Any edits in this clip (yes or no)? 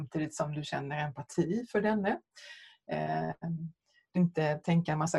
yes